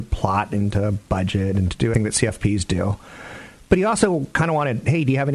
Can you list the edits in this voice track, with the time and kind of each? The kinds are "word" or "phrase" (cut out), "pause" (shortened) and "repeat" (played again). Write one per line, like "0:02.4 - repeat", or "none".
0:01.9 - word